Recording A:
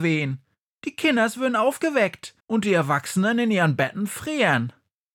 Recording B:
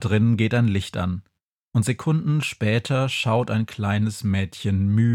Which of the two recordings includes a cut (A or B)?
A